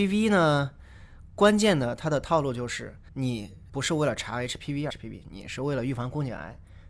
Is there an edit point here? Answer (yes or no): yes